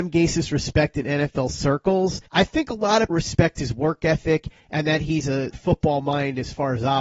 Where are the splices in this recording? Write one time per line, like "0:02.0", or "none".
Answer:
0:02.3
0:03.1
0:05.5

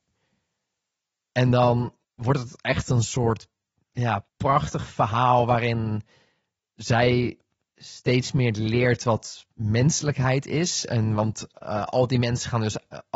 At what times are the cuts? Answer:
0:02.0
0:04.3

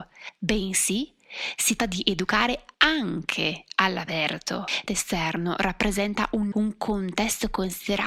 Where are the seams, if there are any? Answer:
0:01.8
0:02.7
0:04.9
0:06.5

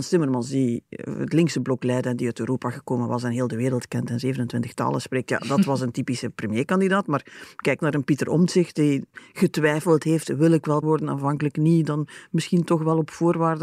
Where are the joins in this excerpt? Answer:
0:10.8

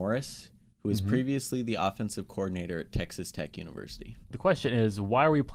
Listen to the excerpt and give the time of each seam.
0:04.2

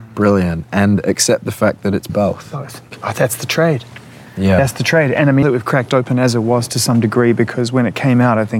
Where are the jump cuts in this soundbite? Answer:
0:02.1
0:05.4

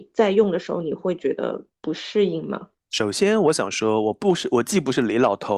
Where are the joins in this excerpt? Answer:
0:01.7
0:02.8

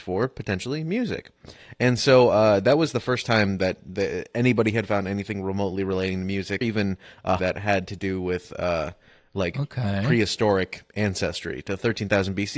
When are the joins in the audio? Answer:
0:06.6
0:07.4

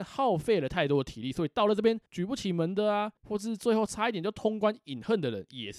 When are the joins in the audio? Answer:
0:02.1
0:03.2

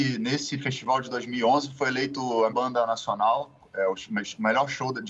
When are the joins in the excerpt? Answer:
0:02.5

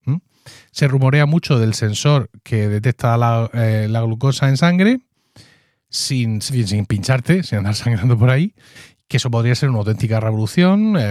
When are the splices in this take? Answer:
0:06.5

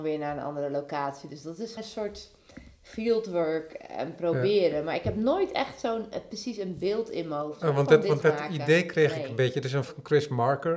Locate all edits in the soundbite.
0:01.8
0:08.2
0:09.9

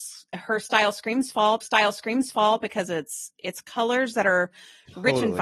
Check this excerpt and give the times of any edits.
0:01.6

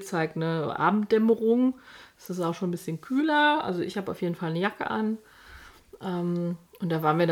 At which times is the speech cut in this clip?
none

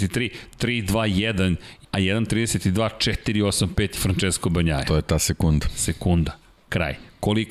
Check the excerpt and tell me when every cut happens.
0:01.8
0:04.0

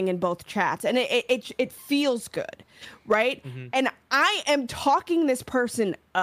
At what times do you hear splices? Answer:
none

